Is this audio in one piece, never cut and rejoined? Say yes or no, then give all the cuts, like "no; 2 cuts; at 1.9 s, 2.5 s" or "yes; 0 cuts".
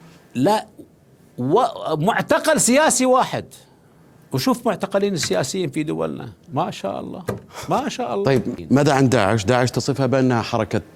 yes; 0 cuts